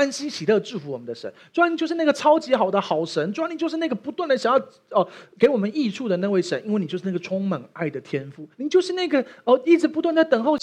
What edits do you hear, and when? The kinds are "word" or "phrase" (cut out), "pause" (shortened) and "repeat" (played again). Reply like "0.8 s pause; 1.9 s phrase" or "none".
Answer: 8.5 s pause